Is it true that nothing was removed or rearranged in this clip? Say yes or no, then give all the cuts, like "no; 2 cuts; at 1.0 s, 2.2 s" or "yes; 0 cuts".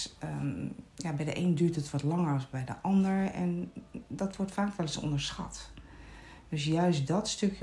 yes; 0 cuts